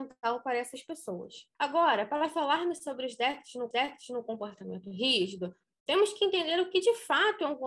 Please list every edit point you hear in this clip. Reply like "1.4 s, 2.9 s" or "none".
1.5 s, 3.7 s